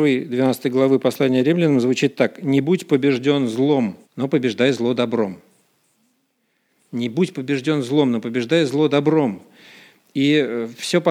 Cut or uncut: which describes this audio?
cut